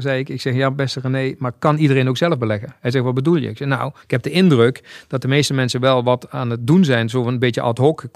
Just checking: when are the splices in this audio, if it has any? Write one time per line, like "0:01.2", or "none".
0:04.0